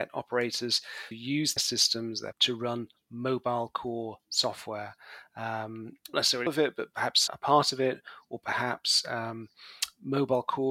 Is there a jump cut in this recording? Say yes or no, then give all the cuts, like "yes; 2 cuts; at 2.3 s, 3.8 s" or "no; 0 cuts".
yes; 6 cuts; at 1.1 s, 1.6 s, 2.3 s, 6.1 s, 6.5 s, 7.3 s